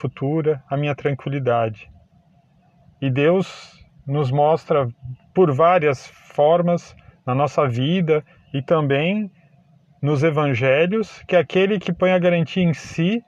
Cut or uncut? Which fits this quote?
uncut